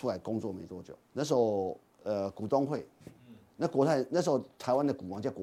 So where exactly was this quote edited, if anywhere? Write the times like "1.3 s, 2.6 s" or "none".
1.0 s

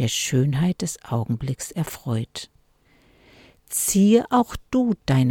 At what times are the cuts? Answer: none

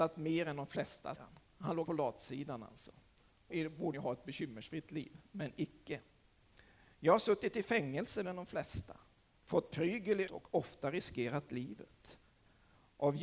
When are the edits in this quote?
1.1 s, 1.8 s, 3.5 s, 3.9 s, 8.2 s, 10.3 s

